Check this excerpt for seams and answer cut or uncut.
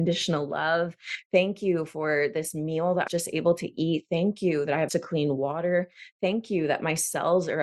cut